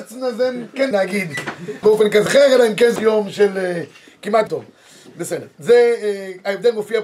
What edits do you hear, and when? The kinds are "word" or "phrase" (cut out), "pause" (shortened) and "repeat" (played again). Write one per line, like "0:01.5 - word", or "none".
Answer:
0:00.9 - word
0:01.8 - word
0:02.3 - word
0:03.0 - word
0:04.5 - word